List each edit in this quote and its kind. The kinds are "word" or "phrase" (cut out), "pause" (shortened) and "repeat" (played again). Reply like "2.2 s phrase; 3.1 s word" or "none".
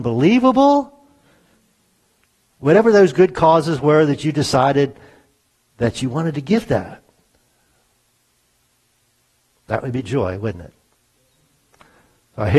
none

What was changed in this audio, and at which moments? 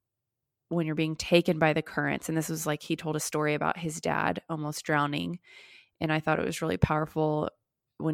none

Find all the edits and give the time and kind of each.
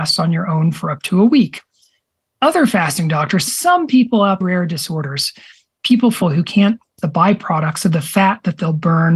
3.5 s phrase; 4.4 s phrase; 6.2 s word; 7.0 s word

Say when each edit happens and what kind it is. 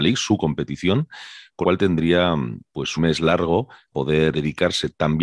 1.6 s word; 3.0 s word; 3.9 s word; 4.3 s word

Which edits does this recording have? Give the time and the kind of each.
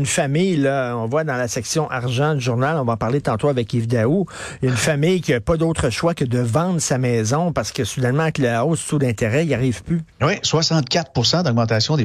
10.1 s pause

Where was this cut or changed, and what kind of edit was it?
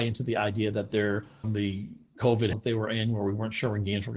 1.4 s phrase; 2.5 s word

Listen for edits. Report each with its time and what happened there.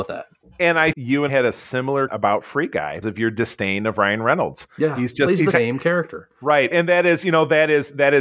0.9 s word; 1.3 s word; 2.1 s word; 3.0 s word; 5.5 s word; 6.7 s word

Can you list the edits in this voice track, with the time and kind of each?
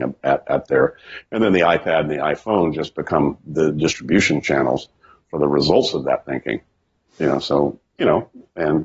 none

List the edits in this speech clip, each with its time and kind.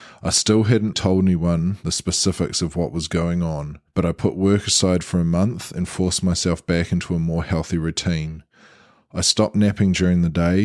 0.9 s word; 3.9 s pause

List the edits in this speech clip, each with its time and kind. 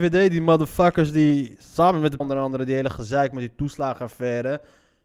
2.2 s word

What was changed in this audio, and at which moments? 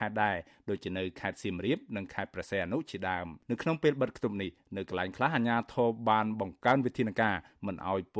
3.4 s pause

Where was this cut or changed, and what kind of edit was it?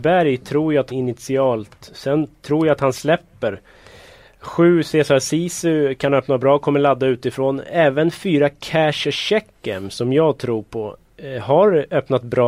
0.9 s word

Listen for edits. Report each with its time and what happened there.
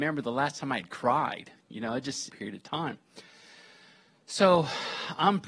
2.3 s phrase

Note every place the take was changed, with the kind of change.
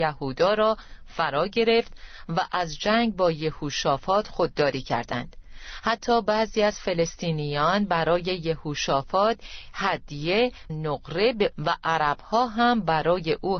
10.7 s word; 11.5 s phrase

